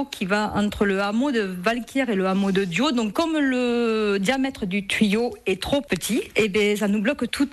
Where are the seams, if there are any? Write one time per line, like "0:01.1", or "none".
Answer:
none